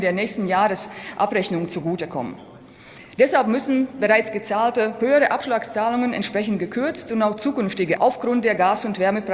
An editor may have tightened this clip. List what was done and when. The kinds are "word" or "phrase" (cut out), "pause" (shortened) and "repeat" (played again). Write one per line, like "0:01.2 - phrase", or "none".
0:08.0 - word